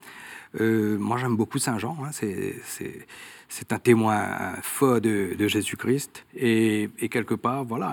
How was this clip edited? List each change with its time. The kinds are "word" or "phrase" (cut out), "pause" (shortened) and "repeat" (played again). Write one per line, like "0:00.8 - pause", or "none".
0:06.3 - pause